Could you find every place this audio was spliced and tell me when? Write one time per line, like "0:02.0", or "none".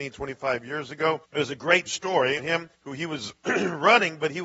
0:01.2
0:01.9
0:02.4
0:02.7